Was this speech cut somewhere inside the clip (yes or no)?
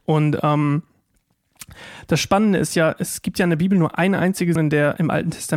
yes